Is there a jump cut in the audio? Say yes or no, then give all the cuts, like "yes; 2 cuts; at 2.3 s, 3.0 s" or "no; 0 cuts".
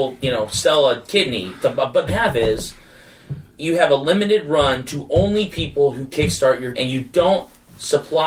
yes; 4 cuts; at 1.6 s, 2.1 s, 3.5 s, 6.7 s